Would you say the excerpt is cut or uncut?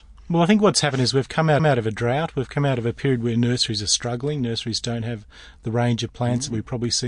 cut